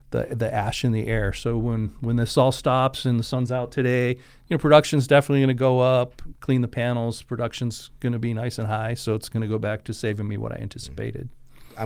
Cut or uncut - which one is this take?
uncut